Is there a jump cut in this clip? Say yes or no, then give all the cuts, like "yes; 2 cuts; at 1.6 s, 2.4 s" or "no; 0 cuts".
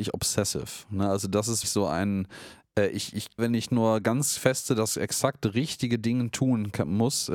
yes; 2 cuts; at 1.6 s, 3.4 s